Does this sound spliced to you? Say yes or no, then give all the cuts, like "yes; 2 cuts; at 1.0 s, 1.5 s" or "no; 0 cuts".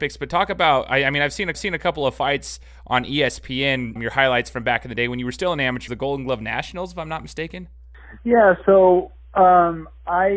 yes; 3 cuts; at 1.5 s, 4.0 s, 5.9 s